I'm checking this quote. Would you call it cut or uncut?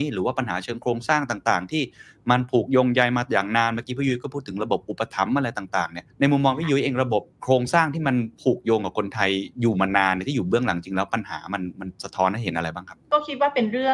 cut